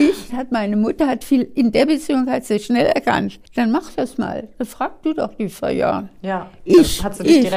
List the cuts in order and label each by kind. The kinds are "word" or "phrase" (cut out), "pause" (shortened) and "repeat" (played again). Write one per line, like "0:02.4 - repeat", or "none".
0:03.5 - pause